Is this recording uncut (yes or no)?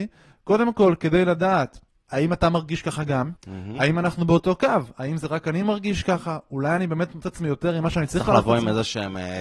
no